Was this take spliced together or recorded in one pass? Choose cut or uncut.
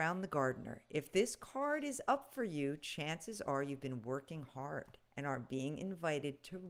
cut